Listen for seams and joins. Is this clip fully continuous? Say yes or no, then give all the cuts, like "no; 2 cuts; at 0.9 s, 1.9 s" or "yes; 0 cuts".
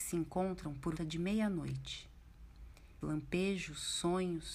no; 2 cuts; at 1.0 s, 3.0 s